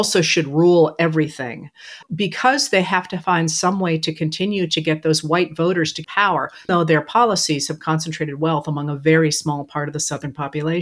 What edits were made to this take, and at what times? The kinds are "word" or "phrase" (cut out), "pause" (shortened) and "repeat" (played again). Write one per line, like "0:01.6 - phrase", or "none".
0:02.0 - word
0:06.0 - phrase
0:06.7 - word